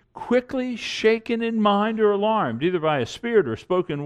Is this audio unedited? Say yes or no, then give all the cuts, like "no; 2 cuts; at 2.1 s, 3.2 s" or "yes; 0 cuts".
yes; 0 cuts